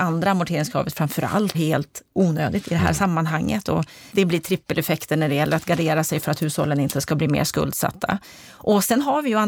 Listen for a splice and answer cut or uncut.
cut